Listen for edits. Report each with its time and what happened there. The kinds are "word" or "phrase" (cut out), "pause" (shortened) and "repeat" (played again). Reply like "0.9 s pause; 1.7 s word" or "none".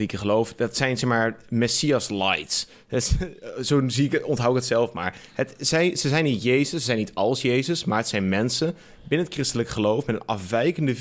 none